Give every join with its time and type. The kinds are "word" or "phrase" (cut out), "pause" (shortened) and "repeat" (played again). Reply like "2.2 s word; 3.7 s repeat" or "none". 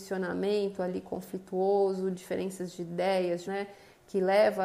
2.1 s word; 3.4 s word